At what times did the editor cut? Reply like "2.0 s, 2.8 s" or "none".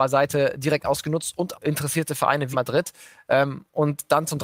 1.5 s, 2.5 s